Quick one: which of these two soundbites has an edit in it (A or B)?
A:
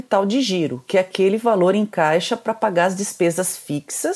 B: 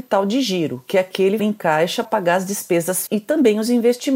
B